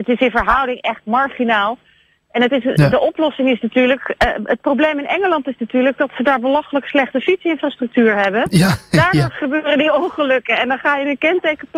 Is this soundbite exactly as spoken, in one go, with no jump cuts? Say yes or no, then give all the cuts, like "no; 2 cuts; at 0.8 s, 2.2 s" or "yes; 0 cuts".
yes; 0 cuts